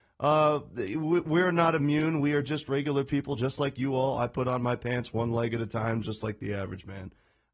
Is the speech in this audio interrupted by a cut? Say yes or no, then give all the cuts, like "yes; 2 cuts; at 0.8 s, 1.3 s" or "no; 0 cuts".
no; 0 cuts